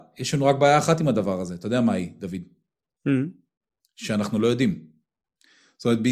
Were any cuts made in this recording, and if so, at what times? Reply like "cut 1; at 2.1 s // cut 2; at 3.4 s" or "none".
none